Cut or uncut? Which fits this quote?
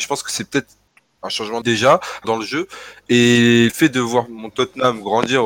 cut